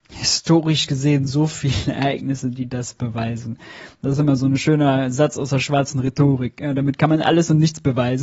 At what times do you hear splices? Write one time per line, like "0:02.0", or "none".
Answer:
none